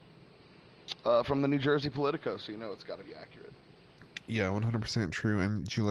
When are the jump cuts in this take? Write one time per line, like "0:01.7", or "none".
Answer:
none